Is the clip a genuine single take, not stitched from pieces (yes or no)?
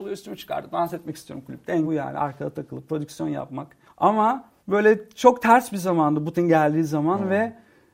no